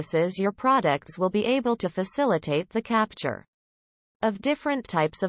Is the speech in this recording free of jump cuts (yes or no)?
yes